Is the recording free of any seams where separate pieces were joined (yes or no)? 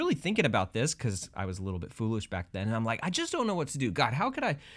yes